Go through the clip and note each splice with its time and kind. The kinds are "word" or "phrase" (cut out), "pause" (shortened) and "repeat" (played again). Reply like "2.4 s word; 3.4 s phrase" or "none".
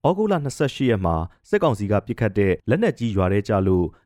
2.6 s pause